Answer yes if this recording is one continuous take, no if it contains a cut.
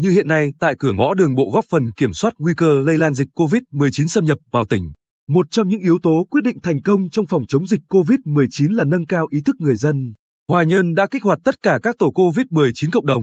yes